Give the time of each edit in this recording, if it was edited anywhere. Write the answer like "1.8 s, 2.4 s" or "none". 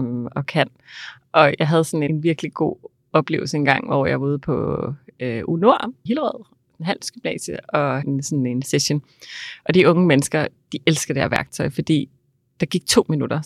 2.1 s, 6.1 s, 8.0 s